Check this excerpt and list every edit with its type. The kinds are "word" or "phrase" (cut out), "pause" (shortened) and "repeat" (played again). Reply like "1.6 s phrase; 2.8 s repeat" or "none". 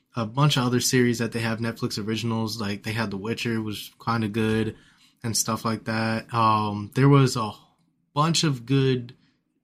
none